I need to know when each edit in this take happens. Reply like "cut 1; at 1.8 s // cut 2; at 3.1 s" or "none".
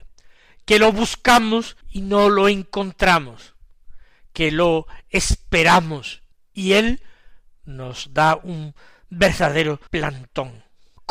cut 1; at 1.8 s // cut 2; at 6.3 s // cut 3; at 9.9 s

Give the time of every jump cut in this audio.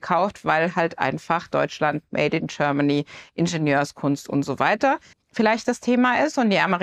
cut 1; at 5.1 s

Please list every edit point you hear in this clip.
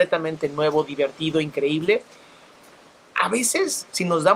none

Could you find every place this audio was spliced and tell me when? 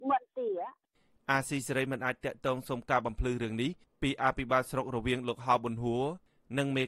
none

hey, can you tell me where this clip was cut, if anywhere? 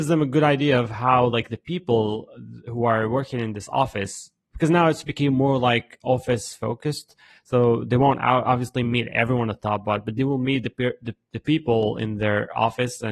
none

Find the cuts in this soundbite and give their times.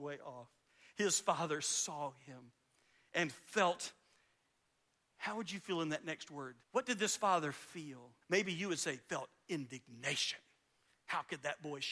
cut 1; at 6.6 s // cut 2; at 8.2 s

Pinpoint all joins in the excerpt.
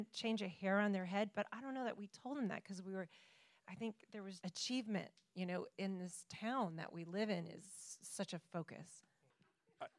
cut 1; at 4.4 s

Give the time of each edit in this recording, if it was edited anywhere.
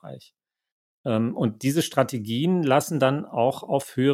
none

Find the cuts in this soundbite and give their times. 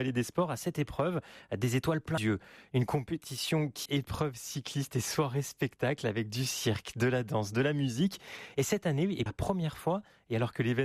cut 1; at 2.2 s // cut 2; at 3.9 s // cut 3; at 9.3 s

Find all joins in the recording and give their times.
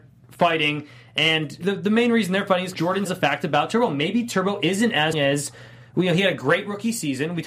cut 1; at 1.6 s // cut 2; at 2.7 s // cut 3; at 3.1 s // cut 4; at 5.1 s

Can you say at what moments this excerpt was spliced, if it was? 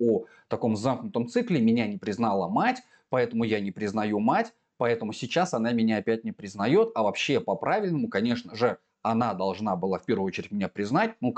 none

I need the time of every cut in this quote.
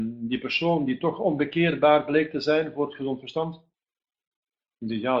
none

